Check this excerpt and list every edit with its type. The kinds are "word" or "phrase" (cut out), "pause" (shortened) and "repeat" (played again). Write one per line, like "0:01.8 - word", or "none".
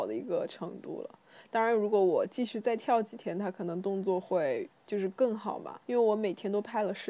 0:04.7 - pause
0:05.8 - pause